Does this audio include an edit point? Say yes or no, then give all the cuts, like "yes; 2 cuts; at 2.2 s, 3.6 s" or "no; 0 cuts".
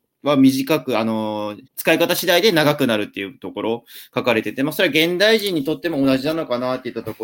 yes; 1 cut; at 1.7 s